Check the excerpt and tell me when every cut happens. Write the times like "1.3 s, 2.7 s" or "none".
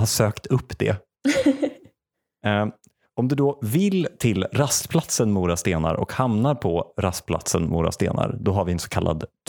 none